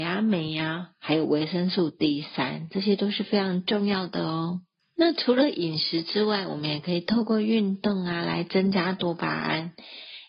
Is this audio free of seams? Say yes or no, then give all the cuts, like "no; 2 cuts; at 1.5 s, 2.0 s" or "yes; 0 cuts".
yes; 0 cuts